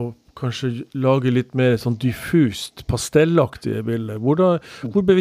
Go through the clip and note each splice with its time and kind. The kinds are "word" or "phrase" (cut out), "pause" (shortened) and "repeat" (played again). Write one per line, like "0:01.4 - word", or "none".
none